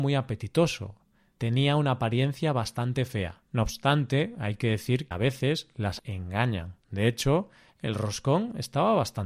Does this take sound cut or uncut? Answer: cut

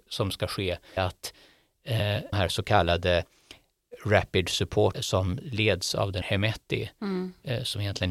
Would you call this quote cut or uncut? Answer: cut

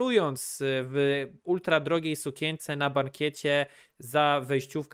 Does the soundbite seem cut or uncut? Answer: uncut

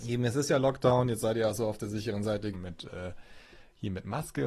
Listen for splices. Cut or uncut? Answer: cut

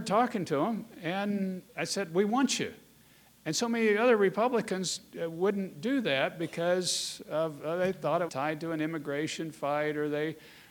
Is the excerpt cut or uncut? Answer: cut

